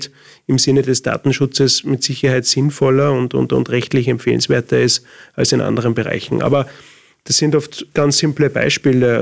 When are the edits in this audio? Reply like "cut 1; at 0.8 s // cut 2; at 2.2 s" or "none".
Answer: none